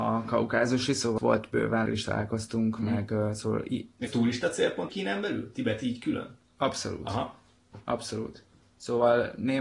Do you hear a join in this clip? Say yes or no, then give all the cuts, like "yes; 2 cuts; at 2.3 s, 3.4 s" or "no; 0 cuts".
yes; 4 cuts; at 1.2 s, 1.9 s, 4.1 s, 4.9 s